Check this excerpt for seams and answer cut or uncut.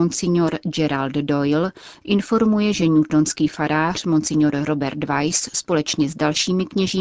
uncut